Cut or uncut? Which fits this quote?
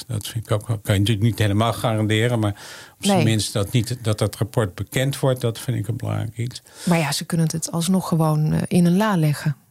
uncut